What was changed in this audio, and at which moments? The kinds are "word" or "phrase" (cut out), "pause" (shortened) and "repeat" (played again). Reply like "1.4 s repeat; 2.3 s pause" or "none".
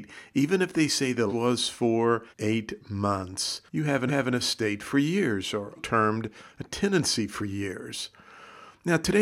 1.3 s word; 2.3 s pause; 3.7 s pause; 4.1 s repeat; 5.8 s word